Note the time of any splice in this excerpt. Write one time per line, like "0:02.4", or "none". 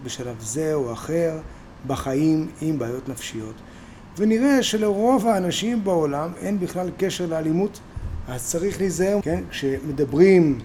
0:09.2